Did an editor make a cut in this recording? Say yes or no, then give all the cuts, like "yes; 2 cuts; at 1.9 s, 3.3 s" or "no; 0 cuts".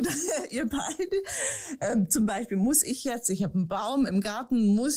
no; 0 cuts